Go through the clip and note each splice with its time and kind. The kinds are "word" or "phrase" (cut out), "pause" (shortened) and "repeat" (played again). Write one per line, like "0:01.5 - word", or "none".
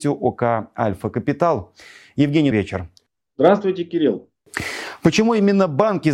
0:02.5 - word